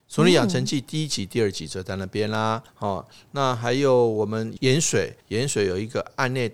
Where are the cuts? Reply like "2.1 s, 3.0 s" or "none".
2.7 s, 5.2 s